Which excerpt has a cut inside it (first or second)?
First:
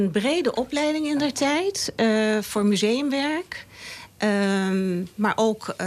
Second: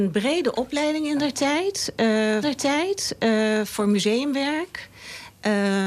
second